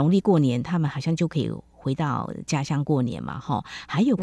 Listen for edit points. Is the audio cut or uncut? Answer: uncut